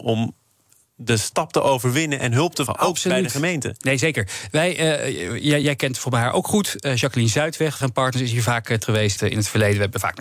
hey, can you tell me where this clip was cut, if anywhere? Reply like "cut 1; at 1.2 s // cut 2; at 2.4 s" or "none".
cut 1; at 2.7 s // cut 2; at 5.6 s // cut 3; at 7.8 s // cut 4; at 8.8 s // cut 5; at 9.2 s